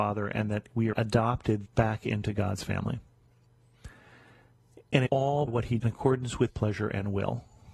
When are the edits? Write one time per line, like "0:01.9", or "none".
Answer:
0:00.9
0:01.7
0:05.1
0:05.5
0:05.8
0:06.5

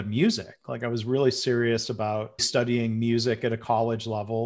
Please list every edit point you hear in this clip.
0:02.4

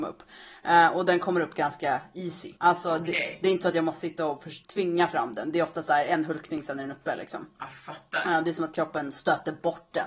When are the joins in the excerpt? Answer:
0:02.6
0:04.6

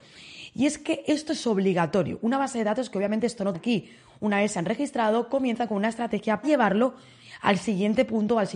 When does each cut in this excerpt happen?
0:03.5
0:06.4

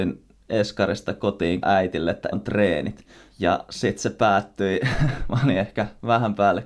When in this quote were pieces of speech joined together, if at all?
0:01.6
0:02.3

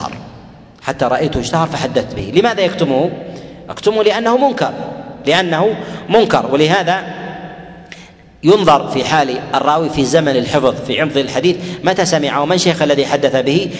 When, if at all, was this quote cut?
none

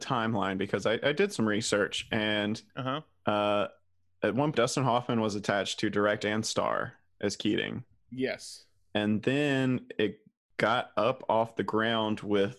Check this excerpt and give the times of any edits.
0:04.5

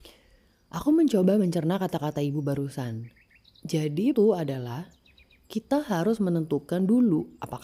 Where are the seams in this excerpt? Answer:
0:04.1

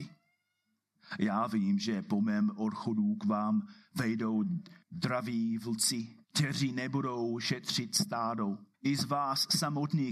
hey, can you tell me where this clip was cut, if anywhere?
0:04.8
0:06.2
0:08.7

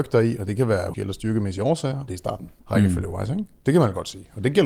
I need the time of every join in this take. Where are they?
0:00.9
0:02.1
0:02.6
0:03.6

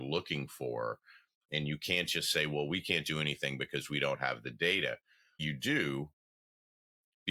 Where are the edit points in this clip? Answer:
0:05.4

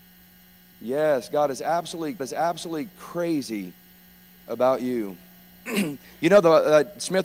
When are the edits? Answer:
0:02.2

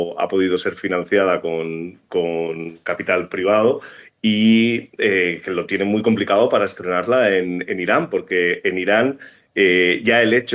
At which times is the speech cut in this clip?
none

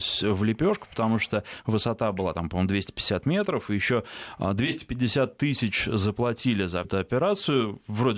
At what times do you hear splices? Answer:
0:06.8

